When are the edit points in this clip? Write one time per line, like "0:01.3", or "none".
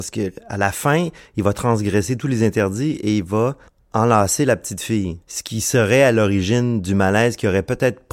0:03.7
0:05.2